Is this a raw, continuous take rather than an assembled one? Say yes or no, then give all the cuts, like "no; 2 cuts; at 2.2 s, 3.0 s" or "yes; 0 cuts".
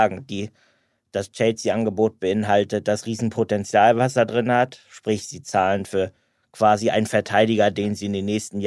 yes; 0 cuts